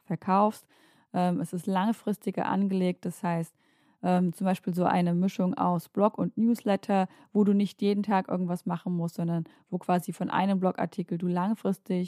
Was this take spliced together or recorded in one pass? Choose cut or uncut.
uncut